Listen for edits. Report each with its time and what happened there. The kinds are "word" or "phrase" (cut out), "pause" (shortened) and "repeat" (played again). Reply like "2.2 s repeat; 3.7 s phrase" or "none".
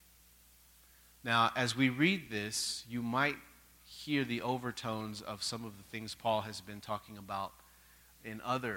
none